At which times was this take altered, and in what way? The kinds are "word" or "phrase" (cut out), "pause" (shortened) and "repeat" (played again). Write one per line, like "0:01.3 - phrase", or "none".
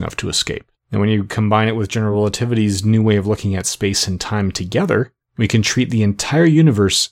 none